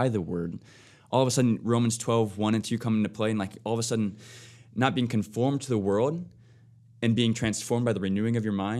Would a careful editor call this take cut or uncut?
uncut